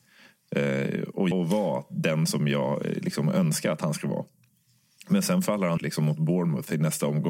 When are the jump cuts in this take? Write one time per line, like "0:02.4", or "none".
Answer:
0:01.3
0:02.3
0:05.8